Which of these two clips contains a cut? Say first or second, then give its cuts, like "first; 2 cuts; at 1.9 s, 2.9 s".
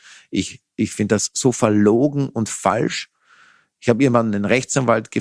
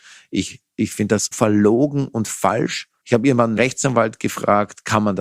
second; 3 cuts; at 1.3 s, 3.0 s, 3.6 s